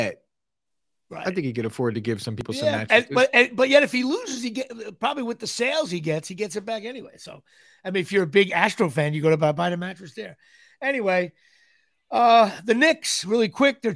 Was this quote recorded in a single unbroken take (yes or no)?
yes